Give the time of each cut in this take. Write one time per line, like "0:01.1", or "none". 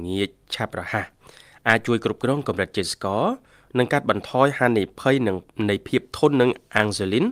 none